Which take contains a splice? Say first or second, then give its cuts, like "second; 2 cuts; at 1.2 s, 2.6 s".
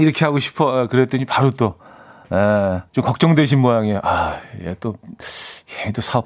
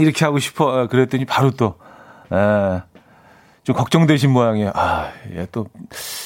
first; 1 cut; at 2.9 s